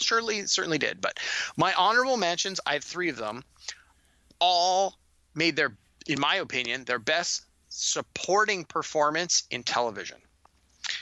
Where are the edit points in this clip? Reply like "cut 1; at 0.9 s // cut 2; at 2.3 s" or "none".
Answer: none